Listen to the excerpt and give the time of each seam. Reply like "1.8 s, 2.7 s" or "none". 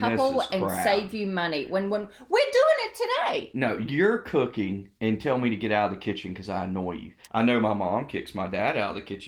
5.0 s